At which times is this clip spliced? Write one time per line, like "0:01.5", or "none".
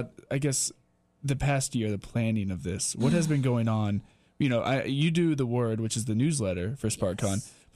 none